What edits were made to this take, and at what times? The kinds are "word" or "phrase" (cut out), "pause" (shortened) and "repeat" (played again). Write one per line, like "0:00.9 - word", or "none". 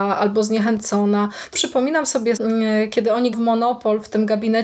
0:01.5 - word
0:02.4 - word
0:03.3 - word